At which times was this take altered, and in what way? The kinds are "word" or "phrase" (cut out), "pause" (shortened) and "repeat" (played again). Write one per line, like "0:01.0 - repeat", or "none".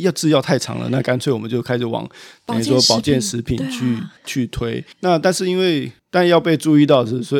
0:04.2 - pause
0:04.9 - pause
0:06.0 - pause